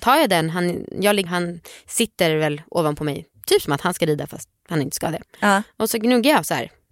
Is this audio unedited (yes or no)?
no